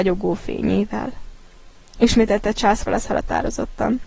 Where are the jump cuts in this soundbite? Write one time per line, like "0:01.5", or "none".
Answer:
none